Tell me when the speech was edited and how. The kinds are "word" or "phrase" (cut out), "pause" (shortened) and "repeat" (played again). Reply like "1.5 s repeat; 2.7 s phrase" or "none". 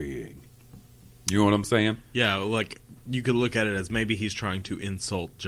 3.0 s pause